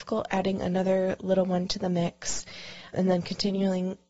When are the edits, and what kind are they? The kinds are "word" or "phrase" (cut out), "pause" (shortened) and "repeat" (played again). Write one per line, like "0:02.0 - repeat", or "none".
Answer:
0:02.9 - word